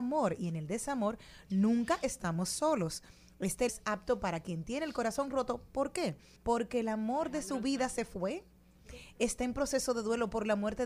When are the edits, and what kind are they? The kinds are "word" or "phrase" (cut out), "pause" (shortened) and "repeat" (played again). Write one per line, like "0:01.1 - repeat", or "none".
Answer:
0:03.7 - word
0:06.4 - pause